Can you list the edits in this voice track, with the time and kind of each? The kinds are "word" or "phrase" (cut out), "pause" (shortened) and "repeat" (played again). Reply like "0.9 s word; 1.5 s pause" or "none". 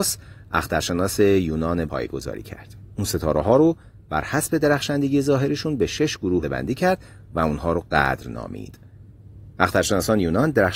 1.9 s word; 6.4 s word

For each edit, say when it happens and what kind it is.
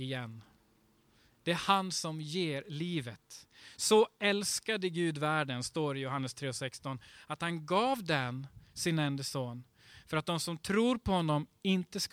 none

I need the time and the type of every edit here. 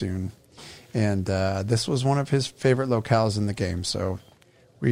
none

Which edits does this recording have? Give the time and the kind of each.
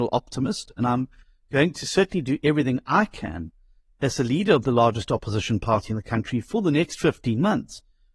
none

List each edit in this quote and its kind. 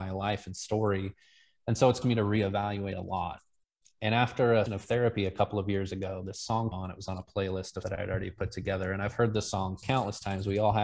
2.0 s word; 4.7 s word; 6.7 s word; 7.8 s word

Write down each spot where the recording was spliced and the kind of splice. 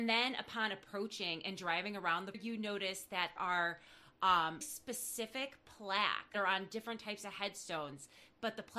2.3 s word; 3.4 s word; 4.6 s word; 6.3 s word

